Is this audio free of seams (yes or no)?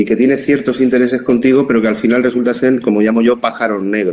yes